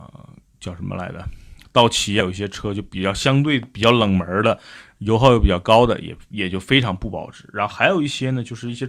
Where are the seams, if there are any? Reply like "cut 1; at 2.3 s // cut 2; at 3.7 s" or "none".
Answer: cut 1; at 2.2 s